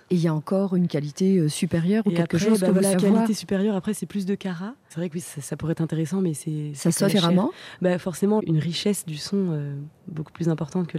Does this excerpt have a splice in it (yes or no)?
yes